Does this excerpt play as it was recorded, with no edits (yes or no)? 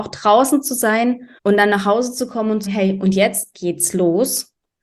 no